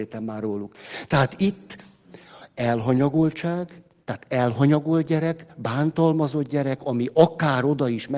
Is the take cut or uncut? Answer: uncut